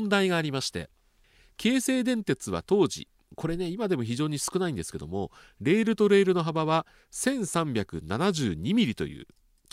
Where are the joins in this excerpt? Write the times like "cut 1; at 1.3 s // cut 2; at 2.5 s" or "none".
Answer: none